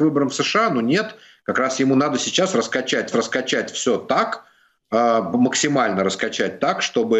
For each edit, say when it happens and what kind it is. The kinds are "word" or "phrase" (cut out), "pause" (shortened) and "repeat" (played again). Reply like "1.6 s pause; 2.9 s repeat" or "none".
3.1 s repeat